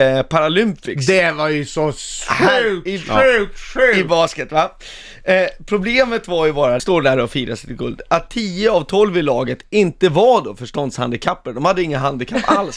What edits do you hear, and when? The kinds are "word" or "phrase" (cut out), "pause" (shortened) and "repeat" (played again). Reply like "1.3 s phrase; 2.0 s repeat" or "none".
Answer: 6.8 s phrase